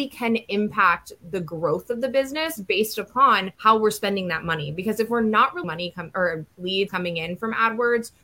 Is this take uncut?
no; 3 cuts; at 3.5 s, 5.6 s, 6.9 s

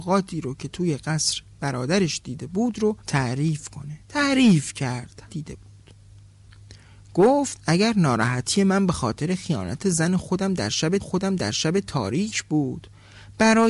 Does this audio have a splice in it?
yes; 4 cuts; at 3.0 s, 4.0 s, 5.3 s, 11.0 s

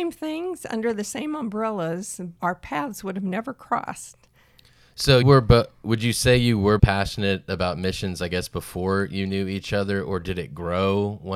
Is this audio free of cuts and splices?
no; 3 cuts; at 2.4 s, 5.2 s, 6.8 s

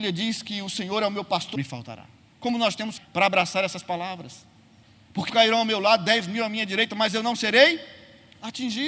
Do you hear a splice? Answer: yes; 3 cuts; at 1.6 s, 3.0 s, 5.3 s

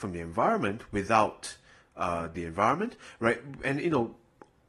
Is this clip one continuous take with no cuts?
no; 1 cut; at 2.3 s

